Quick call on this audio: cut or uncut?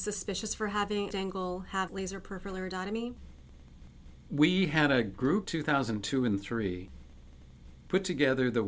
cut